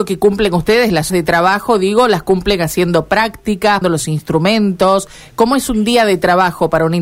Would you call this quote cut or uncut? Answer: cut